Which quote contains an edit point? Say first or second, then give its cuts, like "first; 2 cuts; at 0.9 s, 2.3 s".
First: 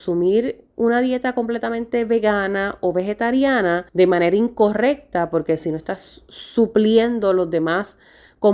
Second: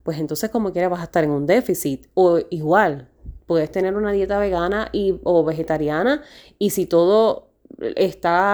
first; 1 cut; at 3.9 s